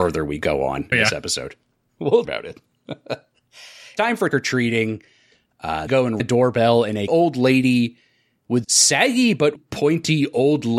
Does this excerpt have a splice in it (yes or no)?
yes